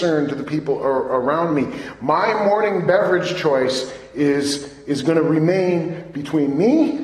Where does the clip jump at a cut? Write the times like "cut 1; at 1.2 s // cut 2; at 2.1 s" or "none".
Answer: none